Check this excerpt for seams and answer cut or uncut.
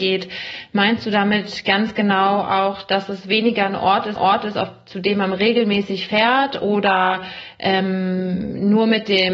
cut